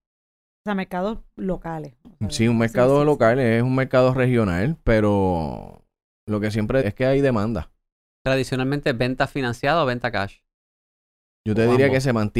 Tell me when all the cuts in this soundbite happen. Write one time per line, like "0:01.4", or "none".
0:06.8